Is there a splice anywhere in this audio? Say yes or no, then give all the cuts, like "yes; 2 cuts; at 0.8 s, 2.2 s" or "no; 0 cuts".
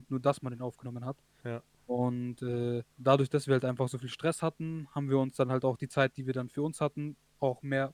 yes; 1 cut; at 2.9 s